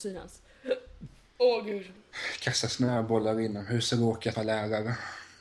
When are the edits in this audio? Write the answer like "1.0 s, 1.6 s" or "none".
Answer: 4.3 s

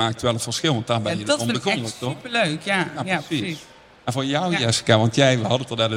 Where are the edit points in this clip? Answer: none

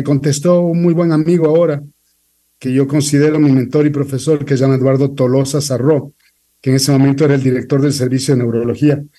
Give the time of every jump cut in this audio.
none

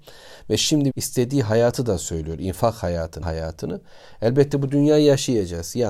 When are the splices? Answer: 0.9 s, 3.2 s

